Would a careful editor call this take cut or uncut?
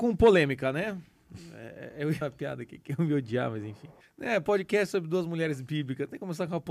cut